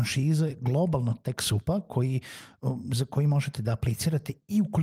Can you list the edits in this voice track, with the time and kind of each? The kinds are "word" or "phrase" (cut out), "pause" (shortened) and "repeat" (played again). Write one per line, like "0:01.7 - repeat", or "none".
none